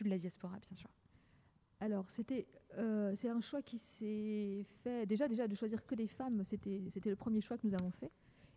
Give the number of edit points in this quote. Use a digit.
0